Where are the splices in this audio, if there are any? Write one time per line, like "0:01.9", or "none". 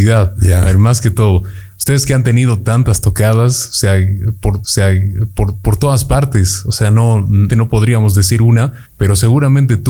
0:04.6
0:07.5
0:08.9